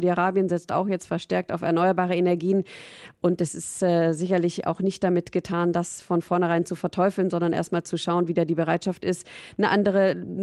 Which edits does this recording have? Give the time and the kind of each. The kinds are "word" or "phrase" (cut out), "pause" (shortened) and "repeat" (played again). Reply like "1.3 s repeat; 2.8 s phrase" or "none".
none